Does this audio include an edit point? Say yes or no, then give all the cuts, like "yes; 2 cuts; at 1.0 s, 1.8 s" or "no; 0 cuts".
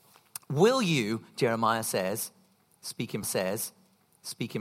yes; 1 cut; at 3.2 s